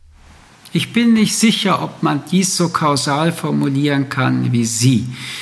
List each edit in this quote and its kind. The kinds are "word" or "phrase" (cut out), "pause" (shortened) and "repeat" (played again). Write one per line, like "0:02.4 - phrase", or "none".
none